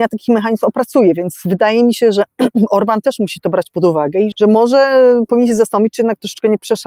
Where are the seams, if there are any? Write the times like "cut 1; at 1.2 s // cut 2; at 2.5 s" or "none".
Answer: cut 1; at 4.3 s